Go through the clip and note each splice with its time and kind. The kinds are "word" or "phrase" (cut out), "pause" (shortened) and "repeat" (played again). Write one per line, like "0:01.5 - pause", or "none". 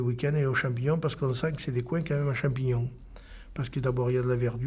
none